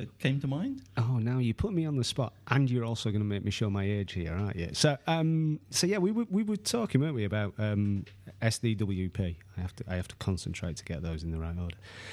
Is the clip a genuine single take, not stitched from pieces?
yes; 0 cuts

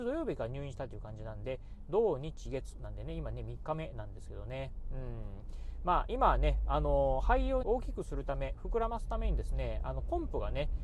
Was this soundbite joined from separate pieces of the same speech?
yes; 1 cut; at 7.6 s

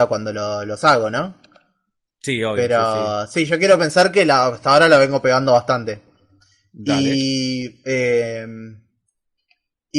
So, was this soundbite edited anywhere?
no; 0 cuts

